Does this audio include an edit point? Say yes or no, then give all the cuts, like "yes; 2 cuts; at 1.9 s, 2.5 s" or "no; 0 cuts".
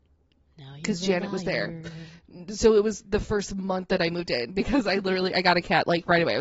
no; 0 cuts